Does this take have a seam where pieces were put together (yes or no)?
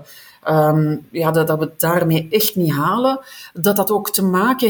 no